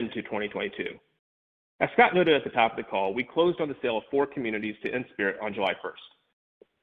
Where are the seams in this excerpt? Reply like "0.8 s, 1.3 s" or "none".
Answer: none